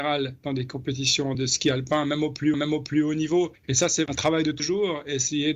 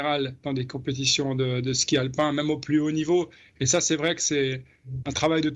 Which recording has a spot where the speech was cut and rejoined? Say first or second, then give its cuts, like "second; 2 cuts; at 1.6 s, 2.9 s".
first; 5 cuts; at 1.3 s, 2.5 s, 3.6 s, 4.1 s, 4.6 s